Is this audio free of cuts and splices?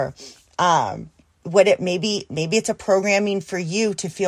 yes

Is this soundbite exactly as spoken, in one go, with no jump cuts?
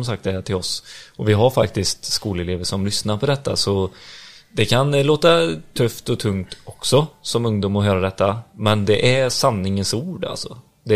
yes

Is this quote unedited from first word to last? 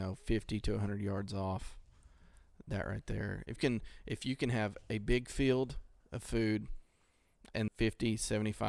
no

